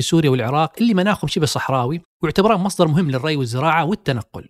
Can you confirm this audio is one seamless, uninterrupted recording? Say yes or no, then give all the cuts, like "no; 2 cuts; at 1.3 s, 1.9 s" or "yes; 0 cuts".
yes; 0 cuts